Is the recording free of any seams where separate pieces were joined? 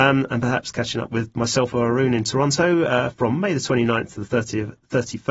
yes; 0 cuts

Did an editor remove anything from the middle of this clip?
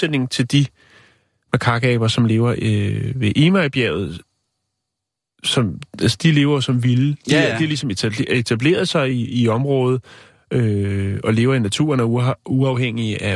no; 0 cuts

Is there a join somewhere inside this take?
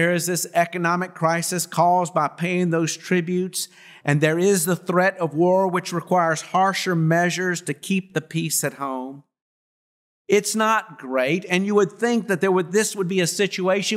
no; 0 cuts

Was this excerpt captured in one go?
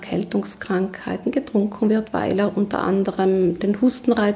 yes; 0 cuts

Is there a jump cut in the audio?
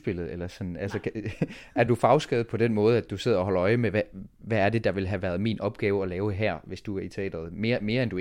yes; 1 cut; at 1.9 s

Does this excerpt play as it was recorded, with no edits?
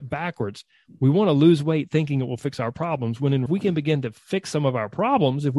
no; 1 cut; at 3.5 s

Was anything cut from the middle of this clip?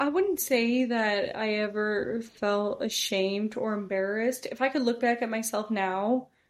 no; 0 cuts

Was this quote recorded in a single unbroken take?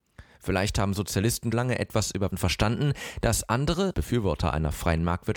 no; 3 cuts; at 1.5 s, 2.3 s, 3.9 s

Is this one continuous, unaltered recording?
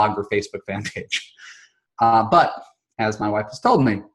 yes; 0 cuts

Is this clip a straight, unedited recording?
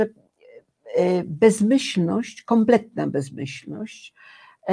yes; 0 cuts

